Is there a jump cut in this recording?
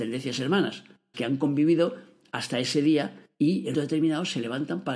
yes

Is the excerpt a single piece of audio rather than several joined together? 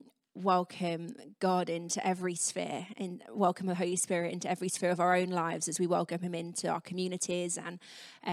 yes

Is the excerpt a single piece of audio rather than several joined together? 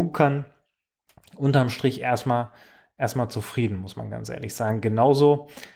yes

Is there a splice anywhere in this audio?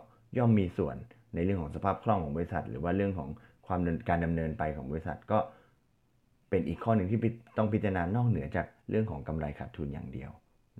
no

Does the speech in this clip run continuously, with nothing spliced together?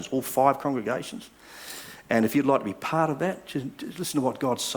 yes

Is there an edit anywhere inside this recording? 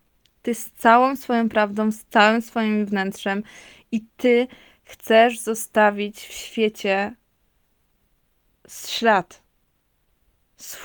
no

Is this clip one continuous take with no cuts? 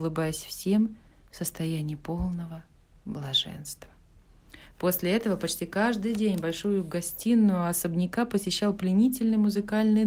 yes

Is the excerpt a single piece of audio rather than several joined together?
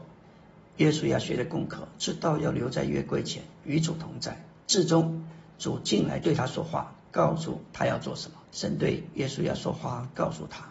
no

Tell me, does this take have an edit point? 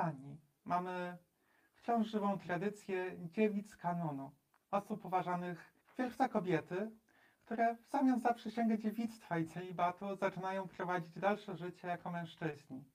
yes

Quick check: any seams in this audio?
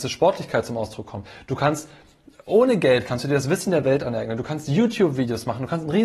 no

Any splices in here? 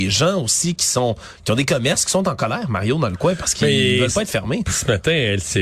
no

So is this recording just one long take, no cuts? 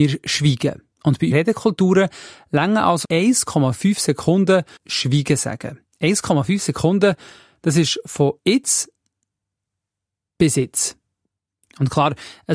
no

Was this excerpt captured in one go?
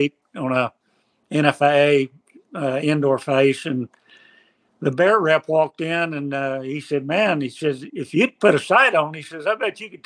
yes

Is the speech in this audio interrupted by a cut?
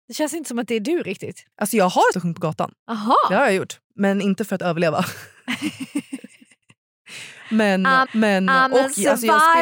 yes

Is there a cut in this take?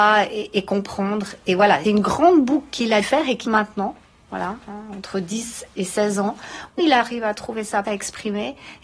yes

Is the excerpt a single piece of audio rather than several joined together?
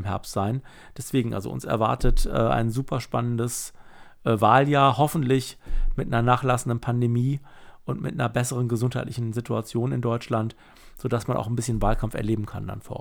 yes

